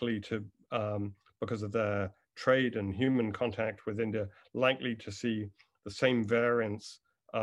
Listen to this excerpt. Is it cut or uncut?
uncut